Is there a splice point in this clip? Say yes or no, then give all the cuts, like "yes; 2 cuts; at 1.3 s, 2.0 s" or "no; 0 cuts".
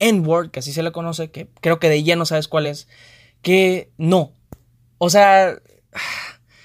no; 0 cuts